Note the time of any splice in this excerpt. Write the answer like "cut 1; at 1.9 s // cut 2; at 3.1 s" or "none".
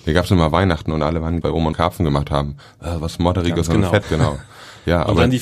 cut 1; at 1.4 s // cut 2; at 1.7 s // cut 3; at 4.0 s